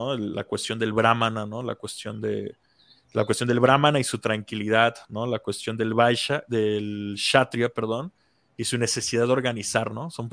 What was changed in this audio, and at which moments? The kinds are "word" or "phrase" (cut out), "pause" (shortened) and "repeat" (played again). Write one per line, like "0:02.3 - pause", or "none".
none